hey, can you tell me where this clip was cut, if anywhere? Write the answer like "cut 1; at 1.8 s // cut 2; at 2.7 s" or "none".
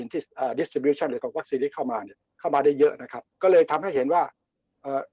cut 1; at 1.2 s // cut 2; at 2.3 s // cut 3; at 3.3 s